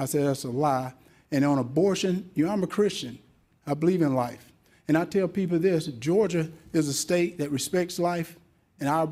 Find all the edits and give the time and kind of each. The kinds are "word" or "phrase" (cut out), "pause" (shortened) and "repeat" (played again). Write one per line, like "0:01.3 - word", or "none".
none